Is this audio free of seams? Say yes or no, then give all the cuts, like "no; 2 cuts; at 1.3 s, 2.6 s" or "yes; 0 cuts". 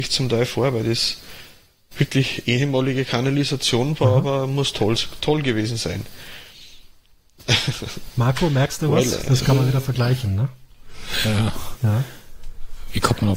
yes; 0 cuts